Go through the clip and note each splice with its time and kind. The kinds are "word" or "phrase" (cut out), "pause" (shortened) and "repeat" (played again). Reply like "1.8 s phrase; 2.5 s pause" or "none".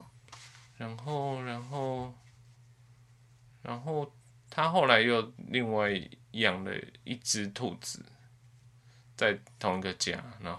none